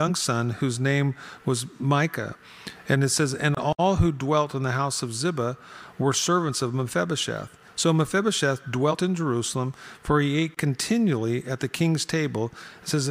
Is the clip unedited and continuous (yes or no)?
yes